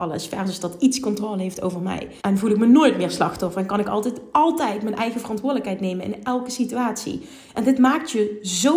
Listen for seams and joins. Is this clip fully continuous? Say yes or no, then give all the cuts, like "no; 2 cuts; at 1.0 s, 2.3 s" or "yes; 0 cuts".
no; 1 cut; at 2.2 s